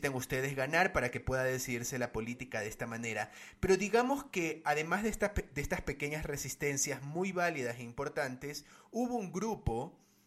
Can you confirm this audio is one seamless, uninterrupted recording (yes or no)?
yes